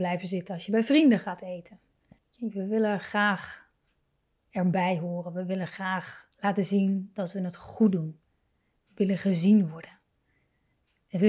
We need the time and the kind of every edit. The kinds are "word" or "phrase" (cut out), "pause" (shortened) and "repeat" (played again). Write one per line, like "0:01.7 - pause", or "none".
0:02.2 - pause

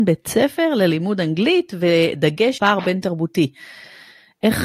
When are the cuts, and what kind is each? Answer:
0:02.6 - word

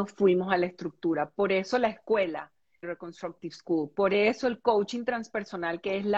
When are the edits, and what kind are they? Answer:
0:02.8 - word

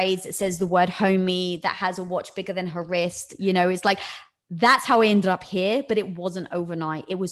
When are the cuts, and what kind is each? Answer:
none

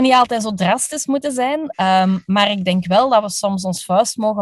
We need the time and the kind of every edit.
none

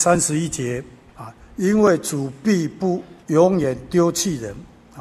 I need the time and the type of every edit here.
0:01.1 - pause
0:03.2 - pause

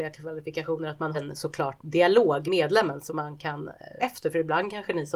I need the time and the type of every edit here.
0:01.1 - word
0:01.8 - word
0:02.5 - word
0:03.1 - word
0:04.0 - word

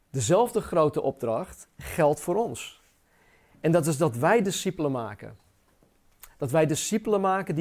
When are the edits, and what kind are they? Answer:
none

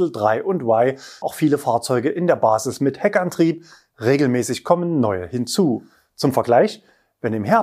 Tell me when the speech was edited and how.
0:01.2 - word

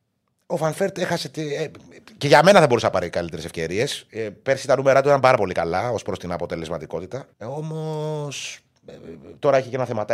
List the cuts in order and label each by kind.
0:07.3 - pause

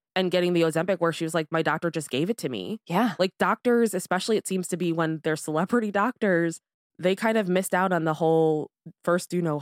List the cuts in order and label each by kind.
none

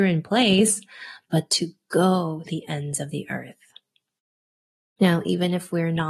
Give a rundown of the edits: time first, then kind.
0:02.5 - word

